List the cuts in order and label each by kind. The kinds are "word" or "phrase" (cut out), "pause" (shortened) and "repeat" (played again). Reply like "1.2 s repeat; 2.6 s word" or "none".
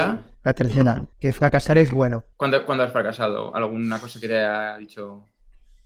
1.1 s pause; 2.3 s pause